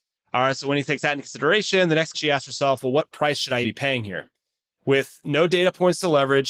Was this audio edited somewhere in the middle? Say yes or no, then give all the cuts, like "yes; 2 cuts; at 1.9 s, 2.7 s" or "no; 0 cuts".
yes; 2 cuts; at 2.1 s, 3.6 s